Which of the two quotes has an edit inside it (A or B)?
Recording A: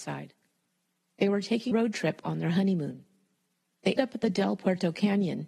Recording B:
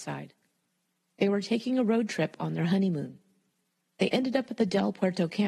A